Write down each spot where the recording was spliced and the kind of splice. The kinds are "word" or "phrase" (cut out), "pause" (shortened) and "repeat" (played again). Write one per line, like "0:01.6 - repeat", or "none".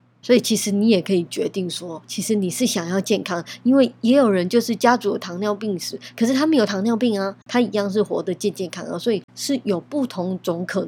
0:07.4 - pause
0:09.3 - pause